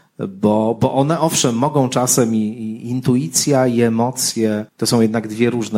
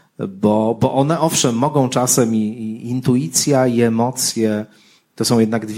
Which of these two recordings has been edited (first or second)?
first